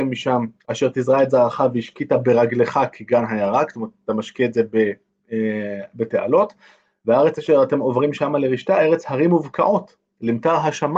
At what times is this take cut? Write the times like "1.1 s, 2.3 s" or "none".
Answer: none